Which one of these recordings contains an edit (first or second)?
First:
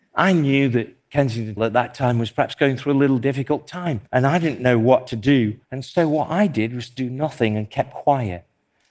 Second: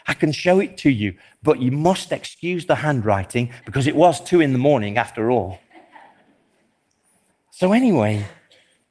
first